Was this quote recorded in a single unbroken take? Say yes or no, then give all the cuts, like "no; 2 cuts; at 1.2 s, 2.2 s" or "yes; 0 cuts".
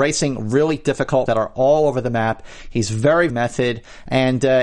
no; 2 cuts; at 1.3 s, 3.3 s